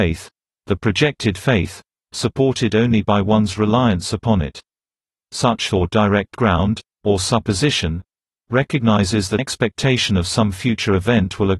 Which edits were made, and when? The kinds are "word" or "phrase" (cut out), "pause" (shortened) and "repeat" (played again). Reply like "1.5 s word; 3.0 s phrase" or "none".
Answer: 5.7 s word; 9.4 s word